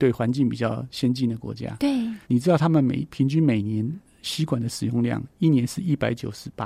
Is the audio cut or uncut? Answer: cut